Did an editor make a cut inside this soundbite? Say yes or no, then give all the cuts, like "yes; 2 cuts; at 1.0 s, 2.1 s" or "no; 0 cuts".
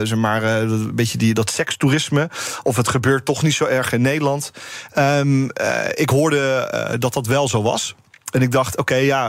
no; 0 cuts